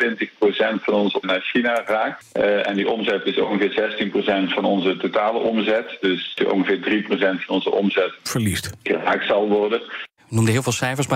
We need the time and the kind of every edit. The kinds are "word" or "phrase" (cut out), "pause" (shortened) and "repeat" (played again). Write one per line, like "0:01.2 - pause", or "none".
0:01.2 - word
0:08.2 - word